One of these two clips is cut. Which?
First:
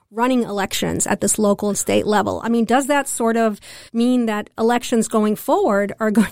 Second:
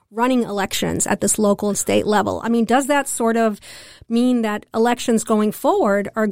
first; 1 cut; at 3.9 s

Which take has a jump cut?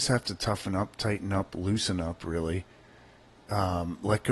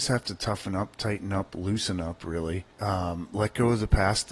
second; 1 cut; at 2.7 s

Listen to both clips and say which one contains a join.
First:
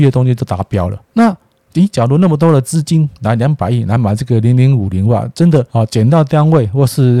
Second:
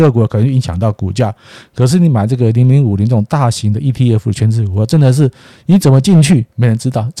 first; 2 cuts; at 1.1 s, 5.7 s

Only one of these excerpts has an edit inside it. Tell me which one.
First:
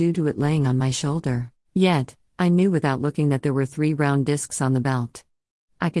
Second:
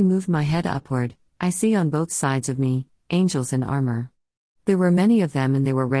first; 1 cut; at 1.6 s

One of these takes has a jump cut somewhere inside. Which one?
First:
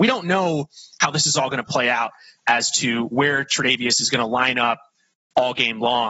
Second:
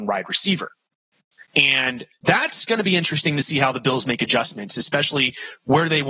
second; 1 cut; at 1.5 s

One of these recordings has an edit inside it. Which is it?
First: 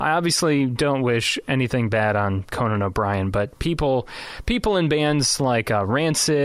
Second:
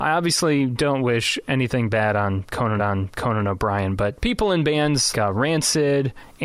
second; 3 cuts; at 2.8 s, 4.2 s, 5.1 s

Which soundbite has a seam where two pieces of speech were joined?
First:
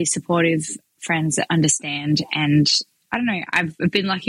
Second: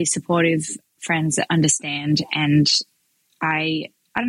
first; 1 cut; at 3.0 s

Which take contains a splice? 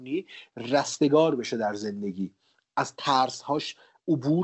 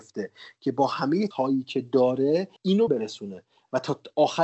second; 3 cuts; at 1.3 s, 2.6 s, 2.9 s

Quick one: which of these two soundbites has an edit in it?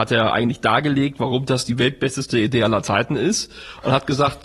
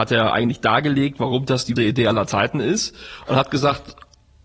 second; 1 cut; at 1.8 s

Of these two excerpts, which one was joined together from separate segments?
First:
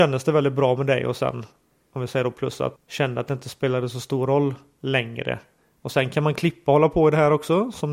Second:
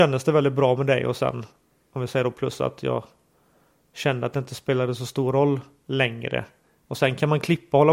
first; 1 cut; at 2.8 s

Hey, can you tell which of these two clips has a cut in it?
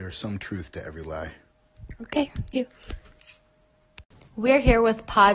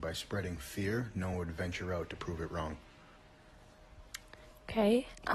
first; 2 cuts; at 2.5 s, 4.3 s

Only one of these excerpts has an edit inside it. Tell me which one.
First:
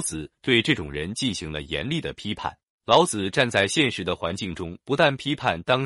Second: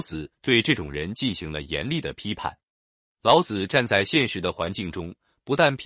first; 2 cuts; at 2.7 s, 4.8 s

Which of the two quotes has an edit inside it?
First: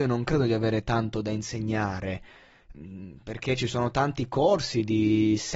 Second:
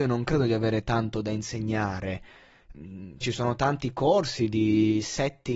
second; 1 cut; at 3.2 s

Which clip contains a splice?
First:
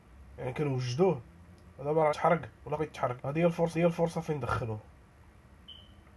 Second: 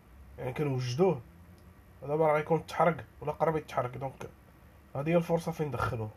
first; 5 cuts; at 1.7 s, 2.1 s, 2.8 s, 3.2 s, 3.7 s

